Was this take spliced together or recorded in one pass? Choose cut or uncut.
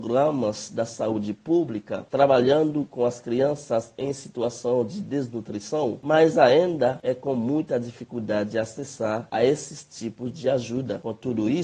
uncut